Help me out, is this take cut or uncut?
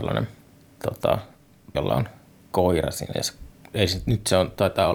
cut